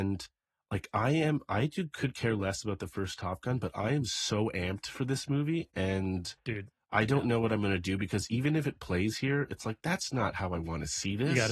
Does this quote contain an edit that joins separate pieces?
no; 0 cuts

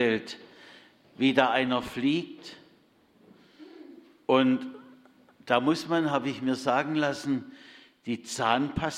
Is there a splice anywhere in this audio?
no; 0 cuts

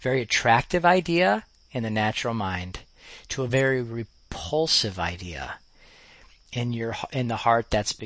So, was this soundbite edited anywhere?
no; 0 cuts

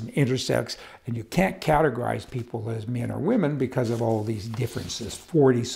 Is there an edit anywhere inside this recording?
no; 0 cuts

